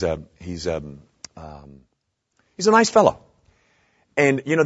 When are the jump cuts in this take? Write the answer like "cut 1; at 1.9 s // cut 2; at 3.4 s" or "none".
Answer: none